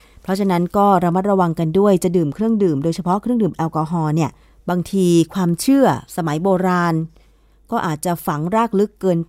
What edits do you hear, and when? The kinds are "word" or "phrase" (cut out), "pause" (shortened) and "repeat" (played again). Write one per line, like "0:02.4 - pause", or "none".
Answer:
0:04.4 - pause
0:06.1 - pause